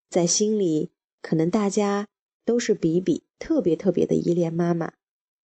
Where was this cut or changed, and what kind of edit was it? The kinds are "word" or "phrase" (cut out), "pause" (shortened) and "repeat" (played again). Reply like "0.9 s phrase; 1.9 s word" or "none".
3.3 s pause